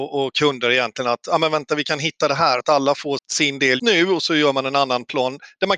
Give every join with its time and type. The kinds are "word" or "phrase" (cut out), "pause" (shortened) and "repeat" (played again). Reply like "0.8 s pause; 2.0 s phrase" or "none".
2.6 s word; 3.2 s word; 3.8 s word